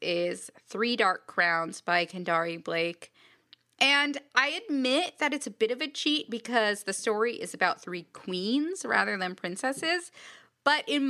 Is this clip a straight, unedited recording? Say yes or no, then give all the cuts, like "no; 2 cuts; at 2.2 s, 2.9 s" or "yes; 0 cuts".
yes; 0 cuts